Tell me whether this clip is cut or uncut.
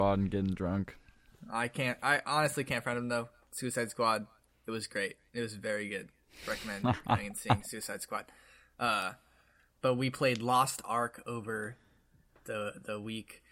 uncut